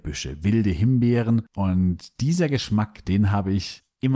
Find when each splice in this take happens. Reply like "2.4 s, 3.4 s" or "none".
1.5 s, 3.0 s

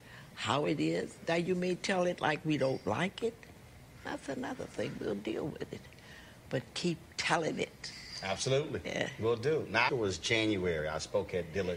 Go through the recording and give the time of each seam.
9.9 s

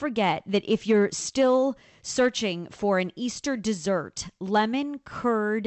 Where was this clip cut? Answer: none

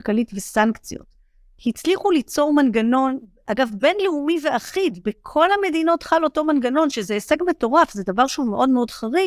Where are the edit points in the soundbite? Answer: none

